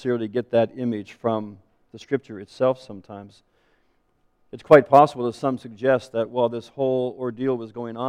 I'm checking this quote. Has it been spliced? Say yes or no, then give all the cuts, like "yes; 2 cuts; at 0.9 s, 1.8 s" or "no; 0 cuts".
no; 0 cuts